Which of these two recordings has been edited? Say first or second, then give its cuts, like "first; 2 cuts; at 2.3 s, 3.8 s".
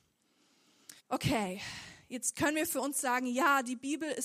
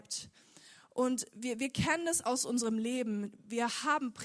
first; 1 cut; at 1.0 s